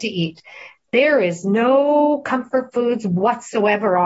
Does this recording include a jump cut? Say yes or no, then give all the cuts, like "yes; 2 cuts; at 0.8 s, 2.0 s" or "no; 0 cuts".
no; 0 cuts